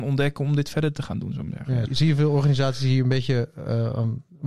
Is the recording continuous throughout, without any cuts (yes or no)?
no